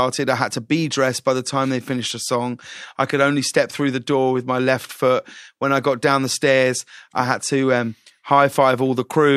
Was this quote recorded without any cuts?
yes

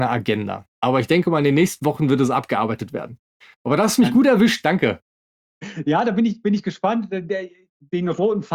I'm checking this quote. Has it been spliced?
no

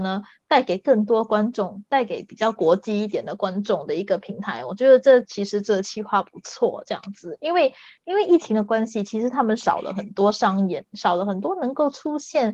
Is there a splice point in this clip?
no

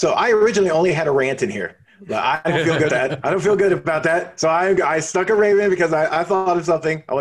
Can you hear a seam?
yes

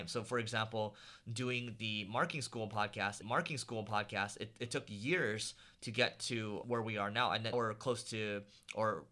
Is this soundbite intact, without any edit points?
no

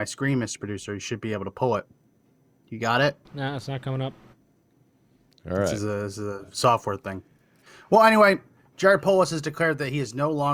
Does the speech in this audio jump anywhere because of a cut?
yes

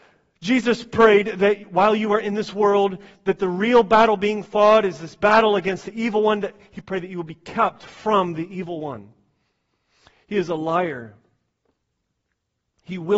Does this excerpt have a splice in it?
no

